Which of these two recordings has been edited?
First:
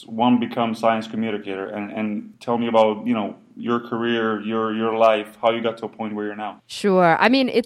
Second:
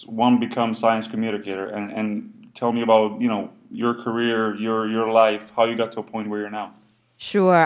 first; 2 cuts; at 2.3 s, 6.6 s

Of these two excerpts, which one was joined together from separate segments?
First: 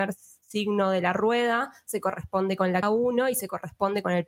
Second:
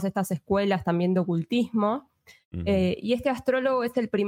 first; 1 cut; at 2.8 s

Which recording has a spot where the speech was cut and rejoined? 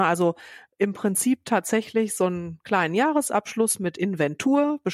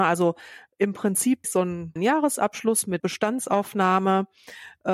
second; 3 cuts; at 1.4 s, 2.0 s, 3.0 s

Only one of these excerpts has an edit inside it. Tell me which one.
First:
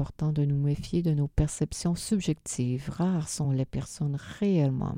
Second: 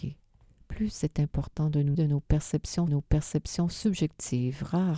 second; 2 cuts; at 1.9 s, 2.9 s

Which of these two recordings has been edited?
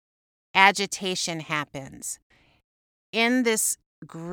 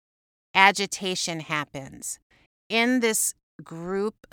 second; 1 cut; at 2.5 s

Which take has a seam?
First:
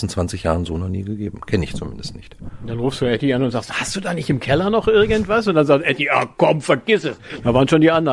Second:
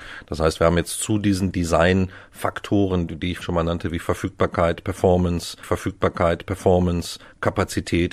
second; 2 cuts; at 3.4 s, 5.6 s

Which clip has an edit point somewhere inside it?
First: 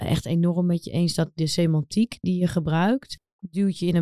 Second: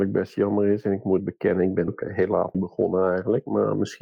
second; 3 cuts; at 1.2 s, 1.9 s, 2.5 s

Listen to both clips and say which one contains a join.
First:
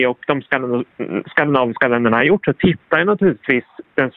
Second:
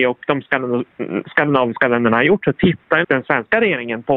second; 1 cut; at 3.0 s

